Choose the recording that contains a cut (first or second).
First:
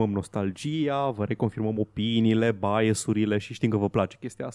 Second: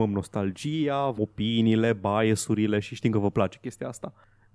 second